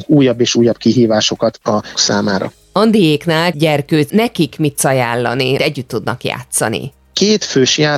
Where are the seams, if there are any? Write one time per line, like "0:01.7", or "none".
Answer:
0:01.9
0:03.5
0:04.1
0:04.8
0:05.6

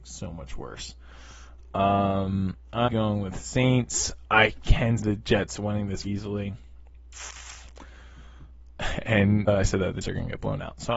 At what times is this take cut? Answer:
0:02.9
0:05.0
0:06.0
0:09.5
0:10.0

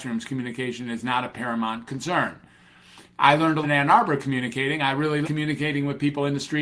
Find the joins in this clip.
0:03.6
0:05.2

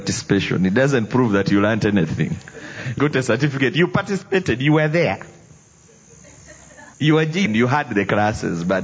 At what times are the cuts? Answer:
0:03.0
0:06.9
0:07.5

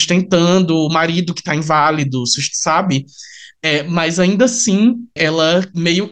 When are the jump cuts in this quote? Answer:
none

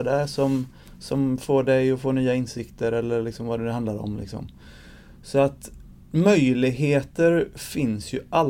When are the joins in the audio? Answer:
none

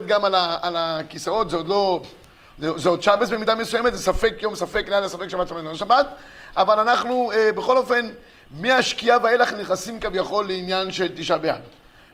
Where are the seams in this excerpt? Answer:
none

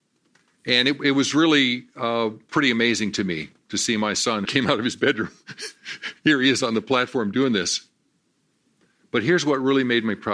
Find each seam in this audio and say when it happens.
0:04.4

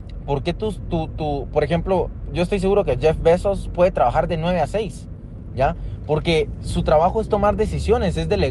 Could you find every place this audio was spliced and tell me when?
none

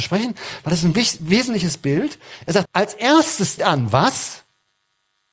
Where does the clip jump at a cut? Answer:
0:02.7
0:03.6

